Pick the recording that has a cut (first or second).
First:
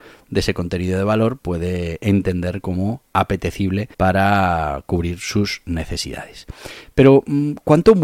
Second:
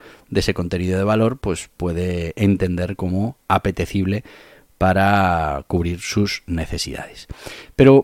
first